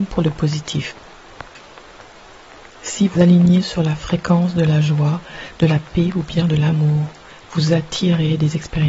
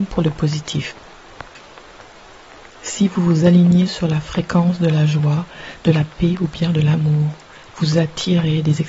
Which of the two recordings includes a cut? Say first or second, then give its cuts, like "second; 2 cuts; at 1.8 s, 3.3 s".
first; 1 cut; at 3.2 s